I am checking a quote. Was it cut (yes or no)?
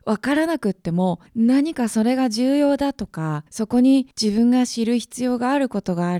yes